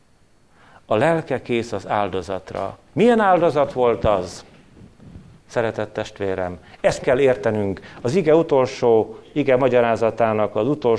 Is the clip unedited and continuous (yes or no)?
no